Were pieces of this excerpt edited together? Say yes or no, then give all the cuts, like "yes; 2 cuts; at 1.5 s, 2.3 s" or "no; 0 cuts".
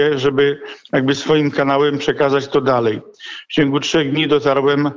no; 0 cuts